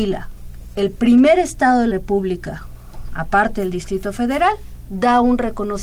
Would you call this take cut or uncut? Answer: cut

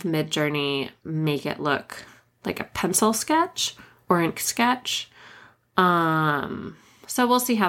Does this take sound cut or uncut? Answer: cut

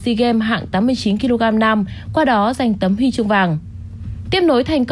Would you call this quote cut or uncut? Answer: uncut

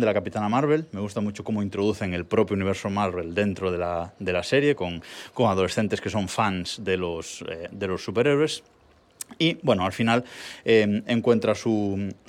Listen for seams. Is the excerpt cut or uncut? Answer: uncut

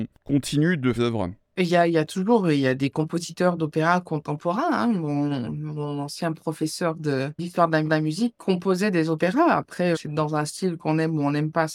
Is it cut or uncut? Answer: cut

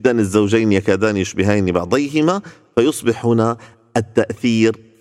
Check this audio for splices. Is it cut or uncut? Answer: uncut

